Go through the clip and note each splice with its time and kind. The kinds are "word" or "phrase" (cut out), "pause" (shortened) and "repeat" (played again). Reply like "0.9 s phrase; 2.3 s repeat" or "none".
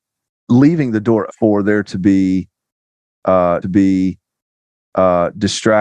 1.3 s word; 3.6 s repeat

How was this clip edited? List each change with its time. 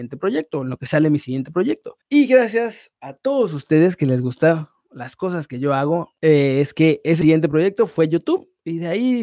2.0 s pause; 6.2 s pause

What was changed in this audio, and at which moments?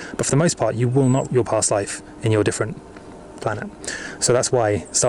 1.2 s word; 3.4 s phrase

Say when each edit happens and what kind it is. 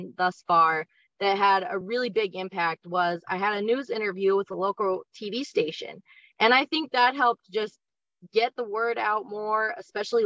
none

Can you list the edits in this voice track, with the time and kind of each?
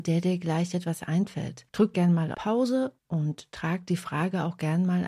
1.7 s pause; 2.3 s word; 3.0 s pause

